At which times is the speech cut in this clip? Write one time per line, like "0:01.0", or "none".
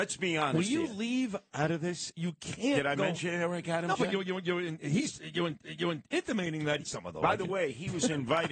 0:01.5
0:04.8
0:05.6
0:06.8